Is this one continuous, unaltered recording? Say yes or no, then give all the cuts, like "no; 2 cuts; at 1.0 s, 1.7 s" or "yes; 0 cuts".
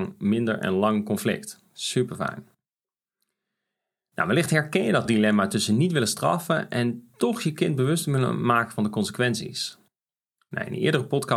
yes; 0 cuts